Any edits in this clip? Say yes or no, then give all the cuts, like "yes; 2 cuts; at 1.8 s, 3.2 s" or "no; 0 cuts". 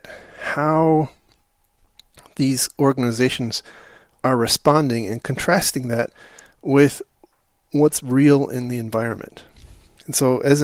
no; 0 cuts